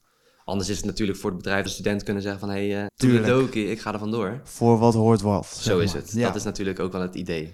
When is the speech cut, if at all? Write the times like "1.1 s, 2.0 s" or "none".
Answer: 1.7 s, 2.9 s